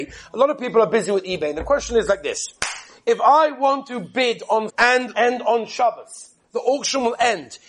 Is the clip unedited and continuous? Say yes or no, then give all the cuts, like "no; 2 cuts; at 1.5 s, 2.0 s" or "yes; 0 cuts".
no; 2 cuts; at 4.7 s, 5.1 s